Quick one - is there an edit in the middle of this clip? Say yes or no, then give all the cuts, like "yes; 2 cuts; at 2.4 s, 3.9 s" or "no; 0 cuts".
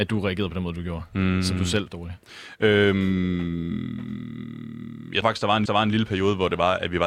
yes; 3 cuts; at 1.9 s, 5.2 s, 5.7 s